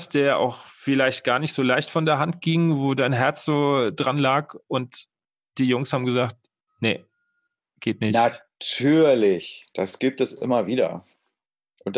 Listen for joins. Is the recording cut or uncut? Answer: uncut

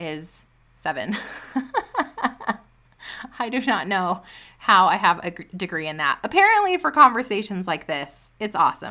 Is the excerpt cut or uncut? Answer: uncut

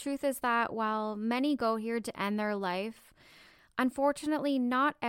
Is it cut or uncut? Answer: uncut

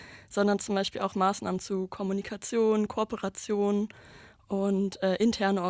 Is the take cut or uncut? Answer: uncut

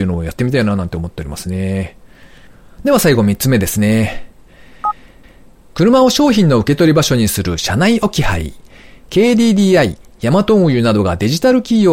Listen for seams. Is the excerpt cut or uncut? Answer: uncut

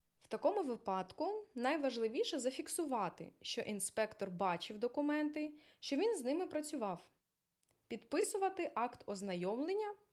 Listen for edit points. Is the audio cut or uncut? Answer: uncut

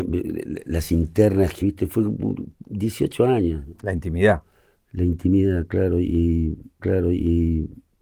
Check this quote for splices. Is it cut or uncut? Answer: cut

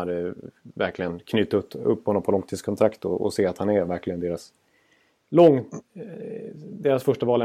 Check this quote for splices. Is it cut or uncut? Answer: uncut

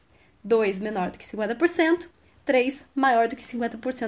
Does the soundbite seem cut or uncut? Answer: uncut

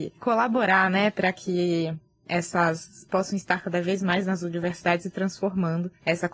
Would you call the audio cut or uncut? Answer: cut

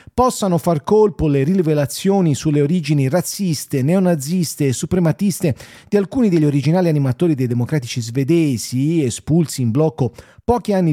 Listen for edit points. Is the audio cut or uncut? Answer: uncut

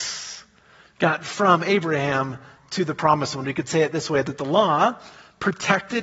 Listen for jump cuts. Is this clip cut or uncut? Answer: uncut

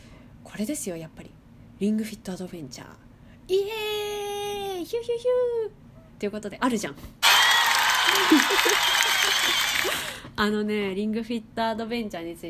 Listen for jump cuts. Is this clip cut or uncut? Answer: cut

